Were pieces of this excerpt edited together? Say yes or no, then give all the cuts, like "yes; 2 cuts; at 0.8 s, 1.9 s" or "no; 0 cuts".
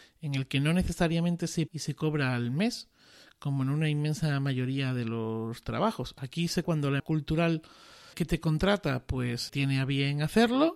yes; 5 cuts; at 1.7 s, 6.6 s, 7.0 s, 8.1 s, 9.5 s